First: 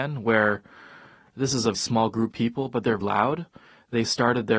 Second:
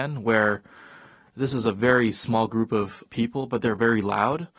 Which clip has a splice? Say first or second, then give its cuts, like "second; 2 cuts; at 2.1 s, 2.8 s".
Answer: first; 3 cuts; at 1.7 s, 2.3 s, 3.0 s